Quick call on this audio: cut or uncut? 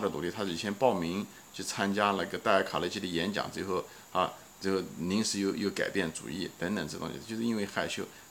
uncut